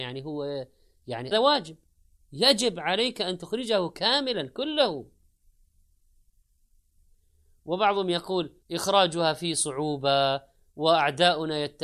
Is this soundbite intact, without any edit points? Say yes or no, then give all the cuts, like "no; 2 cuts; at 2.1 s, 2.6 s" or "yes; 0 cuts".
no; 2 cuts; at 1.3 s, 8.6 s